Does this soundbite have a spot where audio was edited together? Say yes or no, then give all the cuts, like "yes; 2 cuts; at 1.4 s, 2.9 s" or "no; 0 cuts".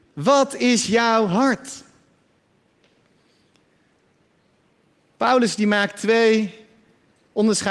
no; 0 cuts